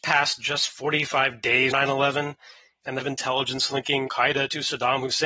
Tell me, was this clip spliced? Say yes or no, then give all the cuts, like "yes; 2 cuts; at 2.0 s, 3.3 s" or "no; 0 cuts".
yes; 3 cuts; at 1.7 s, 3.0 s, 4.1 s